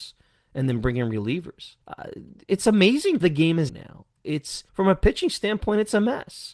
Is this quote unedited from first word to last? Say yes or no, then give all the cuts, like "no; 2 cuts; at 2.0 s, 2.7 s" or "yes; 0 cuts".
no; 4 cuts; at 1.8 s, 3.2 s, 3.7 s, 4.7 s